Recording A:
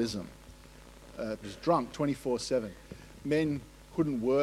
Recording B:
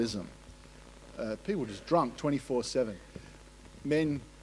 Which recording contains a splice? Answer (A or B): A